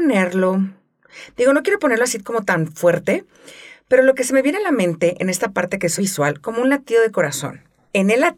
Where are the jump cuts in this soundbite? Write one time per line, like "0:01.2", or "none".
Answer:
0:06.0